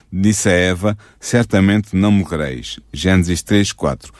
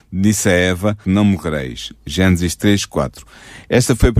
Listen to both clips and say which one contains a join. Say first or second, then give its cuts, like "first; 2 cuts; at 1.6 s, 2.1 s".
second; 1 cut; at 1.0 s